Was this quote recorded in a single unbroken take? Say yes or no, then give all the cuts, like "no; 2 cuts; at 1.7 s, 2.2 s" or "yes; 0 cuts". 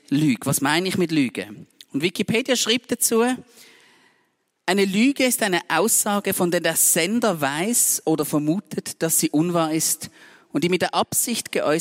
yes; 0 cuts